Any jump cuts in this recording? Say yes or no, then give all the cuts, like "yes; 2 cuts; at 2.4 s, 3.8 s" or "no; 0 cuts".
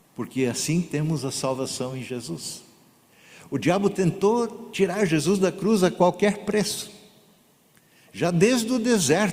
no; 0 cuts